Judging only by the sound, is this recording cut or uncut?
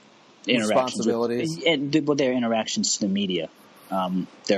uncut